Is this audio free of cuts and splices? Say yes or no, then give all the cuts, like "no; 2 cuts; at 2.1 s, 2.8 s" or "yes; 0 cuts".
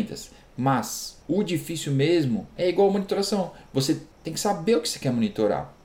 no; 3 cuts; at 1.2 s, 2.6 s, 4.1 s